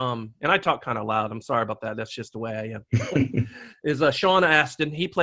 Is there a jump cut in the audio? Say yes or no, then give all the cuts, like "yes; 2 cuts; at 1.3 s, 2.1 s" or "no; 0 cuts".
no; 0 cuts